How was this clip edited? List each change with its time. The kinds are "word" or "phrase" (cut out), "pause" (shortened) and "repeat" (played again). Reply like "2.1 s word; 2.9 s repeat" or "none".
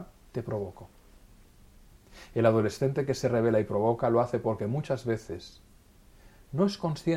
none

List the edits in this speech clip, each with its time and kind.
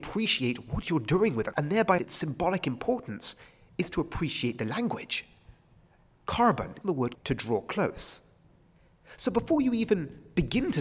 1.5 s word; 2.0 s word; 6.8 s word; 7.1 s word

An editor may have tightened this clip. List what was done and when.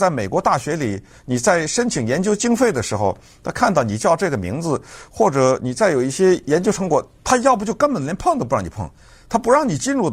none

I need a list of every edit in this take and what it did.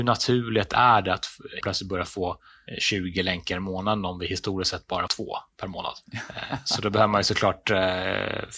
1.6 s word; 5.1 s word

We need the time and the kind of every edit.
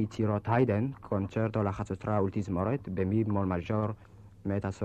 none

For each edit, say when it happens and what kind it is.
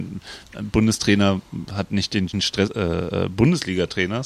2.3 s word; 2.7 s word

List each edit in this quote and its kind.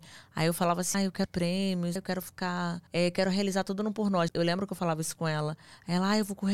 0.9 s word; 1.3 s word; 2.0 s word; 2.9 s pause; 4.3 s word

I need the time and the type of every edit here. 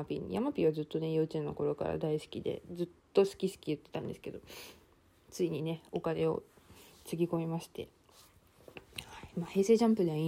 none

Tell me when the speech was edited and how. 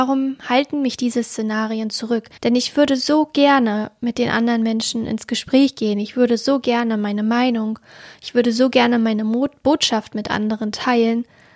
2.4 s pause

